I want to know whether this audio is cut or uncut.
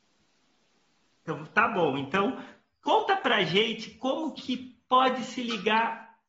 uncut